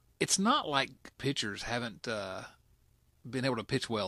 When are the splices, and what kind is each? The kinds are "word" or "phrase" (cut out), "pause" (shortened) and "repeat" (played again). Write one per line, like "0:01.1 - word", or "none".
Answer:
0:01.2 - word